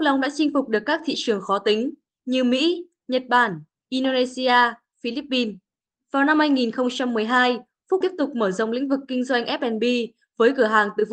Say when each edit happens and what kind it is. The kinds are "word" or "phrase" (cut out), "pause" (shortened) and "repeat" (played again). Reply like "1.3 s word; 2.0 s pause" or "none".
8.0 s word